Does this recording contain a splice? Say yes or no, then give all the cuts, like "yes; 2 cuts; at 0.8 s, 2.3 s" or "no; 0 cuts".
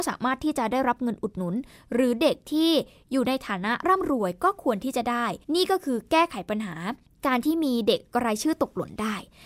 yes; 2 cuts; at 5.4 s, 7.1 s